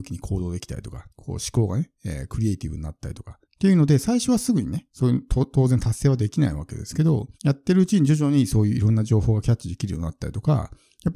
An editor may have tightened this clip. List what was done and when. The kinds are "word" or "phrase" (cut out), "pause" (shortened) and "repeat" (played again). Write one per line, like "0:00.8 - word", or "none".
0:01.1 - pause
0:03.4 - pause
0:07.3 - pause